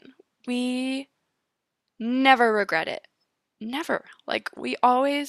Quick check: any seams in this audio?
no; 0 cuts

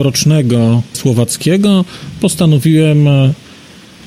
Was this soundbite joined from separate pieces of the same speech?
yes; 1 cut; at 0.9 s

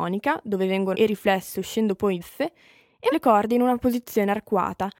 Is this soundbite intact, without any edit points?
no; 3 cuts; at 0.9 s, 2.2 s, 3.1 s

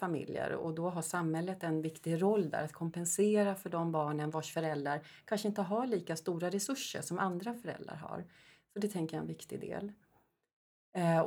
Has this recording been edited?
no; 0 cuts

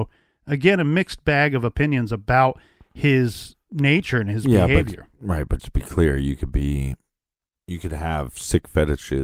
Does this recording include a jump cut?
yes; 1 cut; at 5.6 s

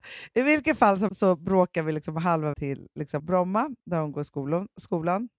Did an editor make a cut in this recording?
yes; 4 cuts; at 1.1 s, 2.5 s, 3.2 s, 3.8 s

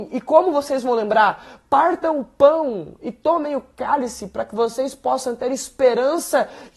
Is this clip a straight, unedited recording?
yes; 0 cuts

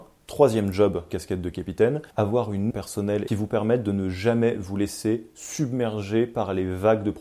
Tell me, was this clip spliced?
yes; 4 cuts; at 1.1 s, 2.1 s, 2.7 s, 3.3 s

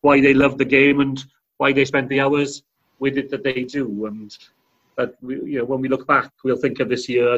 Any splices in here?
no; 0 cuts

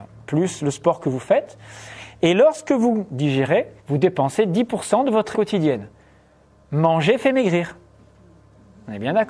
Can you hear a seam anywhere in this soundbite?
yes; 2 cuts; at 3.8 s, 5.3 s

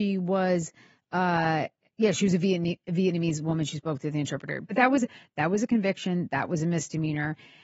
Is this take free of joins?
yes; 0 cuts

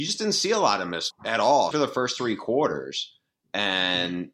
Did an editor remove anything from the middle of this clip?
yes; 2 cuts; at 1.1 s, 1.7 s

